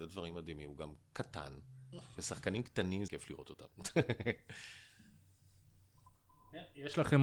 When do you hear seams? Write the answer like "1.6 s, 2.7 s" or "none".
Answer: 3.1 s

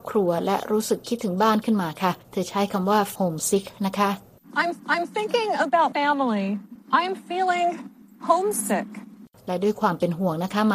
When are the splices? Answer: 2.2 s, 3.1 s, 4.8 s, 5.9 s

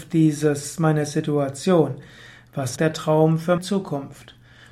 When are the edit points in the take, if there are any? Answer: 2.8 s, 3.6 s

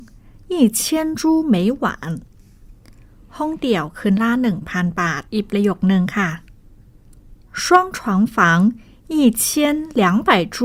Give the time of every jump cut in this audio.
5.3 s

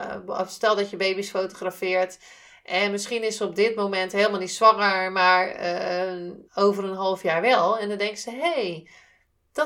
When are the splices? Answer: 6.4 s

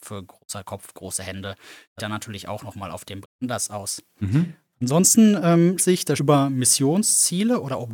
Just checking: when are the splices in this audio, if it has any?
2.0 s, 3.2 s, 5.8 s, 6.2 s

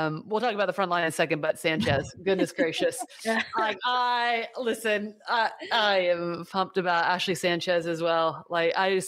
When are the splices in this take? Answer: none

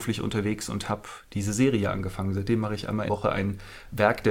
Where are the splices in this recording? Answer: 3.1 s

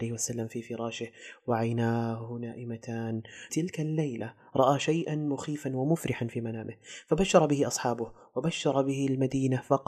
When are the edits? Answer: 3.5 s

